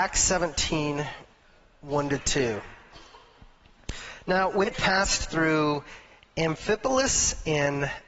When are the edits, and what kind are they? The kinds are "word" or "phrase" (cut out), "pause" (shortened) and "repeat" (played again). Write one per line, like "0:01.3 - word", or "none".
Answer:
0:04.7 - word